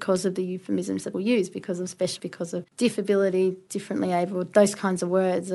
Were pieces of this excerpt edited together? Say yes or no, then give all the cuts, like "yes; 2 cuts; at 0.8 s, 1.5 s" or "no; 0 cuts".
yes; 3 cuts; at 1.1 s, 2.2 s, 2.7 s